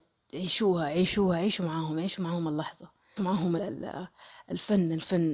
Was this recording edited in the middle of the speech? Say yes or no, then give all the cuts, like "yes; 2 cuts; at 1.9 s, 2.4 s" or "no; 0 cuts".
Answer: yes; 2 cuts; at 3.2 s, 3.6 s